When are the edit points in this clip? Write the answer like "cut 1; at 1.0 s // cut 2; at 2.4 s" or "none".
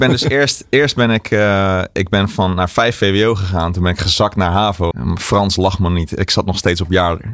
cut 1; at 4.9 s

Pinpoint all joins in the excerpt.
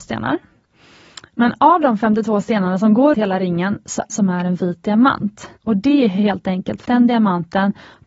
cut 1; at 3.1 s // cut 2; at 4.1 s // cut 3; at 5.6 s // cut 4; at 6.9 s

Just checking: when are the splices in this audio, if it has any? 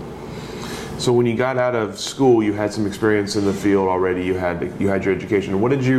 none

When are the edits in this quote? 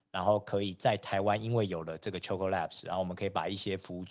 none

